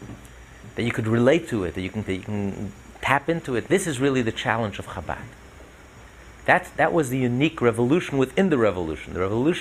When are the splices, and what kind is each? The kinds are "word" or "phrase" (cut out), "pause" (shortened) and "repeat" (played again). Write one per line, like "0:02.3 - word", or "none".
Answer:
0:02.0 - phrase